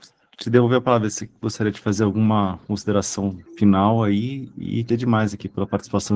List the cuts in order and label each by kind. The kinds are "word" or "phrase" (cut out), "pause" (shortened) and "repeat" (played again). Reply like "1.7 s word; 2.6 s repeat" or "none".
3.5 s pause; 4.9 s word